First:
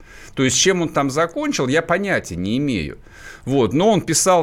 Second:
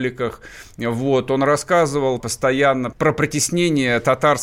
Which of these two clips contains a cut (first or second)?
second